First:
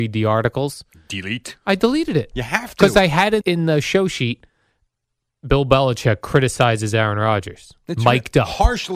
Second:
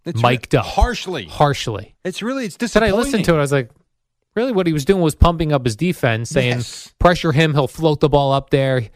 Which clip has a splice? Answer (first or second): first